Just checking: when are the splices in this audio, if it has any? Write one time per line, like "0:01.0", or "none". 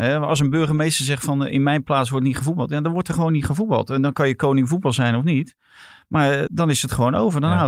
0:06.5